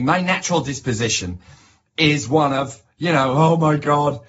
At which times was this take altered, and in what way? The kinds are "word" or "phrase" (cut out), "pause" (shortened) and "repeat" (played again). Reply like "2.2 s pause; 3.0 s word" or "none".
none